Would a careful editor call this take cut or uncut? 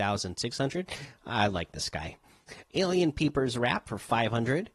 uncut